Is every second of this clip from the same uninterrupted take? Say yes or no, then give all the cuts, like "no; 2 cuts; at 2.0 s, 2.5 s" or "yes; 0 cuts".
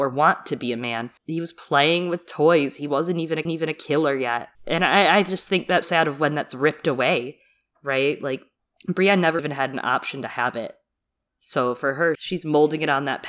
no; 6 cuts; at 1.2 s, 3.5 s, 4.5 s, 5.8 s, 9.4 s, 12.1 s